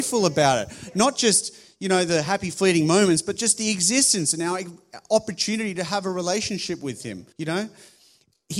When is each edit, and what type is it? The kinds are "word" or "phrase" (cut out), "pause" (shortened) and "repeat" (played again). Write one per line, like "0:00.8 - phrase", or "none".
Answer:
0:07.3 - pause